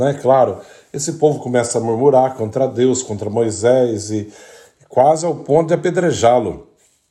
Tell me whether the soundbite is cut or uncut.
uncut